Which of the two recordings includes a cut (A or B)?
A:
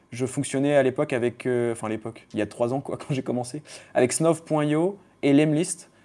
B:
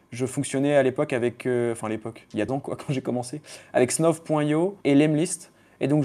B